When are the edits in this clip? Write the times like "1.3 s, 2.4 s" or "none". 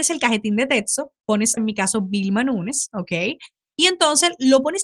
1.6 s